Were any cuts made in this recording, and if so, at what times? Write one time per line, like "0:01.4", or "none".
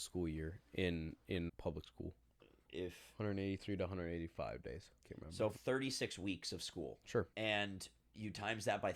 0:01.5
0:02.7
0:05.0
0:05.6
0:07.3